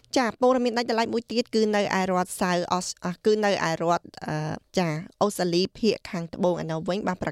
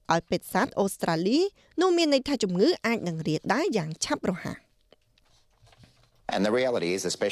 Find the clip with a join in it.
first; 1 cut; at 4.7 s

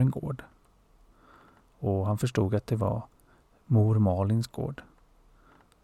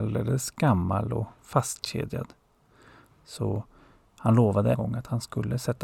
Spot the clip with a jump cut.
second; 1 cut; at 4.7 s

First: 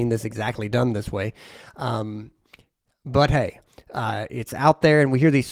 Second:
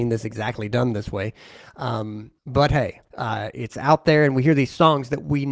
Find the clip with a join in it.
second; 2 cuts; at 2.4 s, 3.1 s

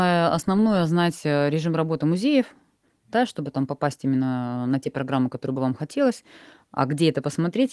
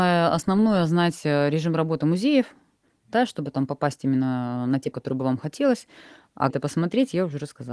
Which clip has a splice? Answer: second; 2 cuts; at 4.9 s, 6.5 s

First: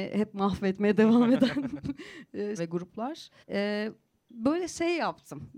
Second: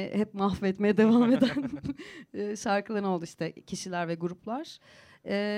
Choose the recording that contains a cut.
first; 2 cuts; at 2.6 s, 3.4 s

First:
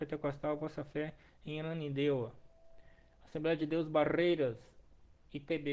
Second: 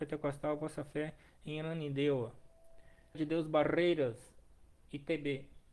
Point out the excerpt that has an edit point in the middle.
second; 1 cut; at 3.1 s

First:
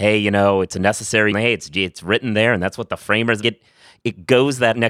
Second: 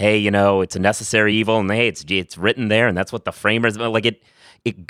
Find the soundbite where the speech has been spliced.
first; 2 cuts; at 1.3 s, 3.4 s

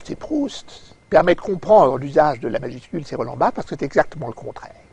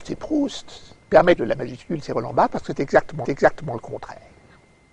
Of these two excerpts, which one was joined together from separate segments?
second; 2 cuts; at 1.4 s, 3.2 s

